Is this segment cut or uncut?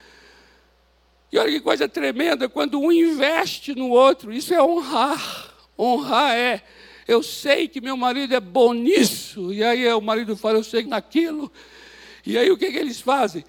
cut